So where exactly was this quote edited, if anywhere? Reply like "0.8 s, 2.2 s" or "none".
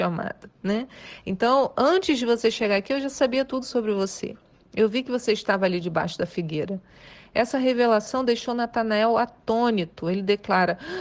none